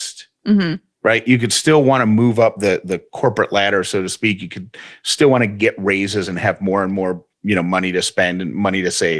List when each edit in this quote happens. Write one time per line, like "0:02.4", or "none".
none